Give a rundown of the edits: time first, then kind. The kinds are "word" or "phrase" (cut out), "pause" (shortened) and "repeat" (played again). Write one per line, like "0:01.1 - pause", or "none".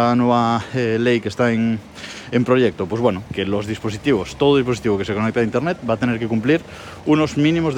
none